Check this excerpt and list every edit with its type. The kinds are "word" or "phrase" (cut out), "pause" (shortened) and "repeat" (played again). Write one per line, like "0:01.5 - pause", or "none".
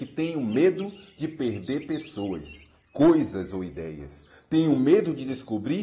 none

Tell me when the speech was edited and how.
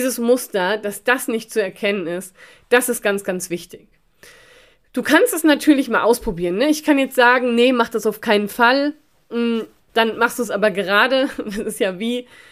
none

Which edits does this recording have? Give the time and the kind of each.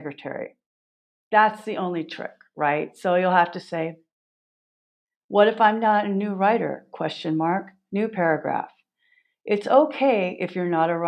none

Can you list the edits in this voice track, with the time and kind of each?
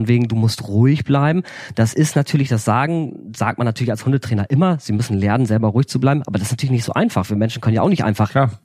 none

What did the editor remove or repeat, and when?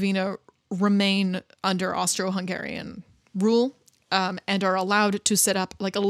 none

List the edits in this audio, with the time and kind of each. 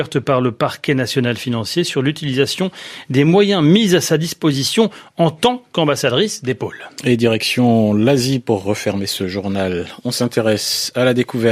none

